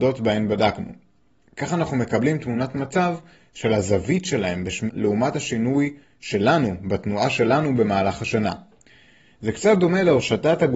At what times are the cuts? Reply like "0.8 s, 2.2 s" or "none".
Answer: 4.9 s